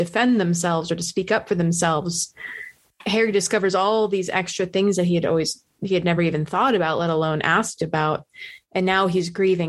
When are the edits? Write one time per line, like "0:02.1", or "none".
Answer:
none